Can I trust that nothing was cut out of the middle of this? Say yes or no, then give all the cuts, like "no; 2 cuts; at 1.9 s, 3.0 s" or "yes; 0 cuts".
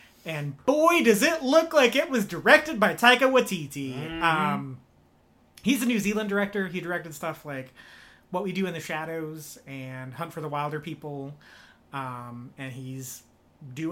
yes; 0 cuts